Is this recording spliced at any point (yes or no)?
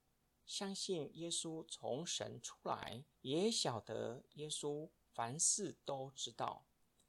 yes